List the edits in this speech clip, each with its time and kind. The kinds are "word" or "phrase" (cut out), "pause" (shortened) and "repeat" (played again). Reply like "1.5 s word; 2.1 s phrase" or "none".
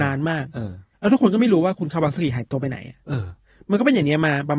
0.9 s pause